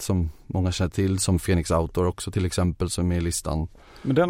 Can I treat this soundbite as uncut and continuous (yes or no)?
yes